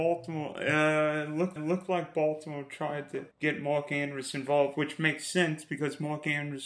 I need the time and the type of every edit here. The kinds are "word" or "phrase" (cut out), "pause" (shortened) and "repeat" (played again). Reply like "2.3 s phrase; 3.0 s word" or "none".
1.6 s repeat; 3.3 s pause